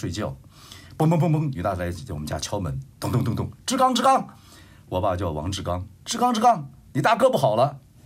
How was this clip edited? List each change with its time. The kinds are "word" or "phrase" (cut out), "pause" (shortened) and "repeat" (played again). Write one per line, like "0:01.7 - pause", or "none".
0:06.0 - pause

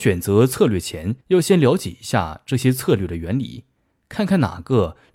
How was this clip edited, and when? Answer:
0:01.2 - pause

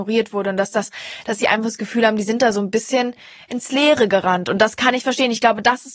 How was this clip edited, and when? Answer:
none

